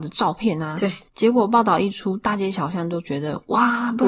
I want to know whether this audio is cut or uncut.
cut